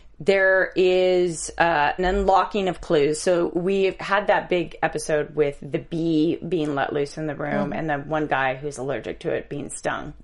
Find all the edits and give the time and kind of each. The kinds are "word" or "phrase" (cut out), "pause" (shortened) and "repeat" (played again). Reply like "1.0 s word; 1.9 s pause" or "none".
2.0 s word